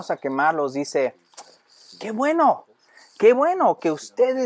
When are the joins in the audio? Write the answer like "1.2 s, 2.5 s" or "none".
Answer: none